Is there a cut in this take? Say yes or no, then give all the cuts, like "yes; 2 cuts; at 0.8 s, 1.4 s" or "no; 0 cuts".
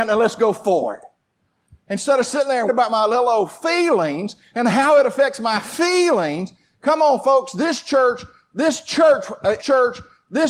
yes; 2 cuts; at 2.7 s, 9.6 s